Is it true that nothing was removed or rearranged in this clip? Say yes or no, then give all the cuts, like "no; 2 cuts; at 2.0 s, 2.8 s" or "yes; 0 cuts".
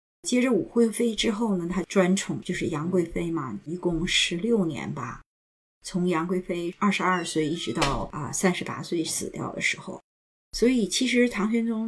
yes; 0 cuts